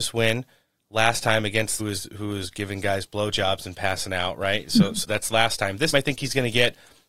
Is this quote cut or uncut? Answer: cut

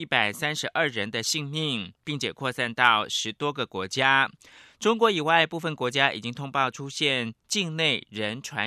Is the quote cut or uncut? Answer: uncut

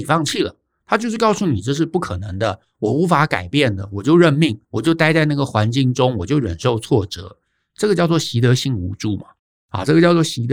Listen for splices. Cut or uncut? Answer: cut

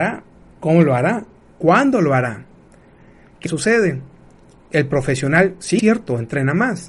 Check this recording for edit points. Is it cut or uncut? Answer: cut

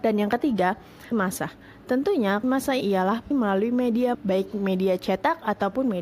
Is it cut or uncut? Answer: cut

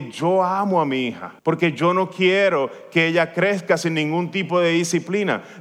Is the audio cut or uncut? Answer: cut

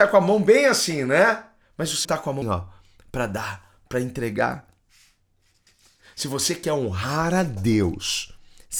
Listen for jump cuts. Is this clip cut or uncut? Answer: cut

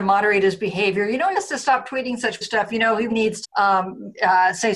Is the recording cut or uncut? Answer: cut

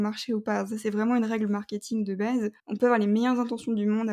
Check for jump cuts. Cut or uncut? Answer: cut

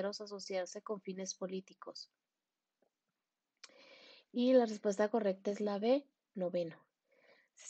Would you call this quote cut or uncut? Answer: uncut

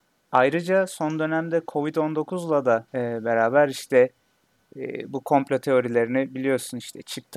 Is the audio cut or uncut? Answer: cut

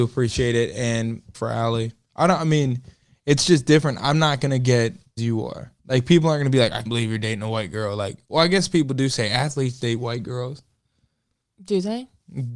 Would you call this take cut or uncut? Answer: cut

